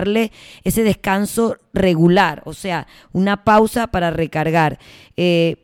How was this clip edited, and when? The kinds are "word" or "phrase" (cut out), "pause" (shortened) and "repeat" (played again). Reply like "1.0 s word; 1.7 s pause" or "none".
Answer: none